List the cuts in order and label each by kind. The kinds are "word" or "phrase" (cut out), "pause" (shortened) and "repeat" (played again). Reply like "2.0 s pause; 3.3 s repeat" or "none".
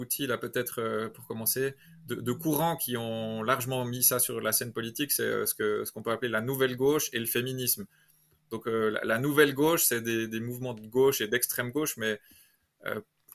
none